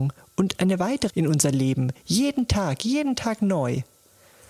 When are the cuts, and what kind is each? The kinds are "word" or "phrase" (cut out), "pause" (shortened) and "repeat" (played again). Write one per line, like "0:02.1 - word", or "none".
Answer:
0:01.1 - word